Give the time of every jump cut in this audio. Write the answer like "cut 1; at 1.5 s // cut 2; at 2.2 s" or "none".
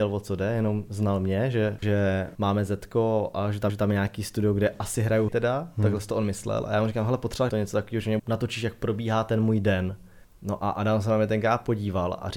cut 1; at 1.8 s // cut 2; at 2.3 s // cut 3; at 3.7 s // cut 4; at 5.3 s // cut 5; at 7.5 s // cut 6; at 8.2 s // cut 7; at 10.2 s